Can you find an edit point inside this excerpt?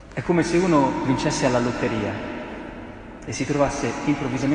no; 0 cuts

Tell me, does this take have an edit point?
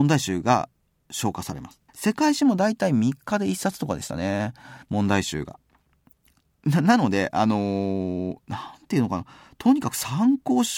yes; 2 cuts; at 1.9 s, 4.8 s

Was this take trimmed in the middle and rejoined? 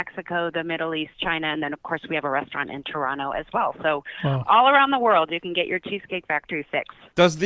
no; 0 cuts

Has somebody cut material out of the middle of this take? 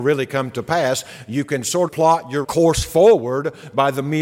yes; 2 cuts; at 1.9 s, 2.4 s

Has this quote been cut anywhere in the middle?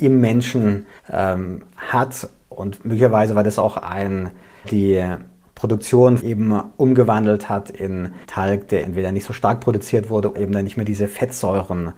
yes; 6 cuts; at 1.0 s, 4.6 s, 6.2 s, 8.2 s, 8.8 s, 10.3 s

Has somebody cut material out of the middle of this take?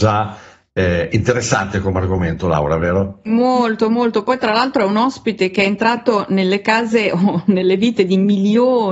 no; 0 cuts

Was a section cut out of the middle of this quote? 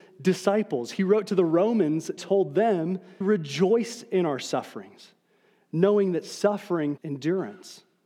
yes; 3 cuts; at 2.2 s, 3.2 s, 7.0 s

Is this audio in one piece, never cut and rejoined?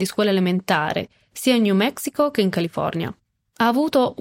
yes; 0 cuts

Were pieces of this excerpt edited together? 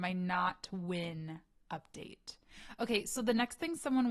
no; 0 cuts

